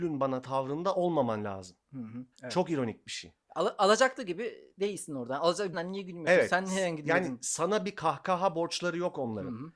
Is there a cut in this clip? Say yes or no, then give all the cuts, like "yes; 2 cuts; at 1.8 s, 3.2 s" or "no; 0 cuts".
yes; 3 cuts; at 2.3 s, 3.4 s, 5.7 s